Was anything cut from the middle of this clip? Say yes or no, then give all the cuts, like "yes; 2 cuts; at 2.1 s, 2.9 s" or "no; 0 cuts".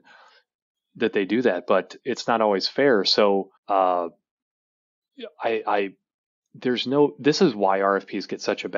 yes; 1 cut; at 3.6 s